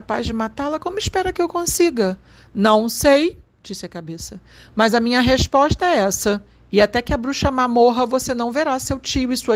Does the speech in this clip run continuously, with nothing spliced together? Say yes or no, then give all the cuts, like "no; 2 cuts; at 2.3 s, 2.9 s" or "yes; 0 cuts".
yes; 0 cuts